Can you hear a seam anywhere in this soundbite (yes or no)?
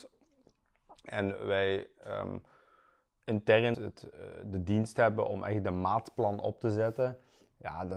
yes